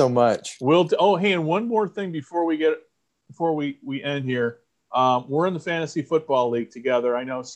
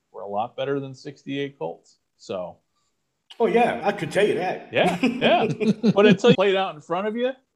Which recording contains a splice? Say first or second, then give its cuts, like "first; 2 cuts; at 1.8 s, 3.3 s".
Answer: second; 2 cuts; at 3.8 s, 6.3 s